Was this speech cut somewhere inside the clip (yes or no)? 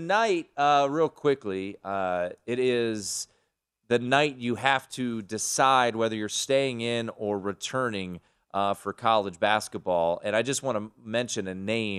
no